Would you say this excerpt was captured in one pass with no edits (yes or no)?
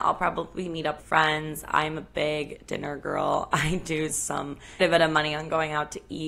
no